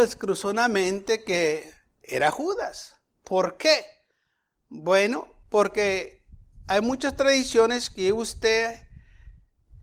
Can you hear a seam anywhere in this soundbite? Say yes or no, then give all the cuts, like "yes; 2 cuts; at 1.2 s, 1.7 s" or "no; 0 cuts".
no; 0 cuts